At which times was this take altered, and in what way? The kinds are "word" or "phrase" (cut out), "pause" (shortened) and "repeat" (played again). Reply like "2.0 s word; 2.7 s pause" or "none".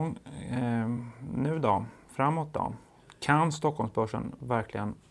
none